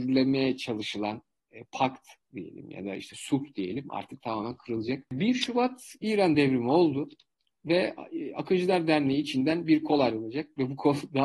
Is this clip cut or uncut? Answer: uncut